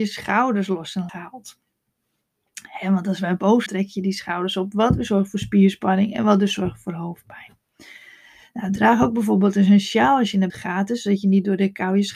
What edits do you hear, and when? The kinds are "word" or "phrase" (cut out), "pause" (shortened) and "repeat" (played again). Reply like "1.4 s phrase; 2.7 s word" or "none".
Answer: 1.1 s word; 3.7 s phrase; 10.5 s word